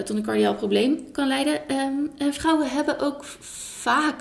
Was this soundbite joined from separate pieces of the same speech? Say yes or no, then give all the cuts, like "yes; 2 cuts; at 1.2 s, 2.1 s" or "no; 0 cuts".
no; 0 cuts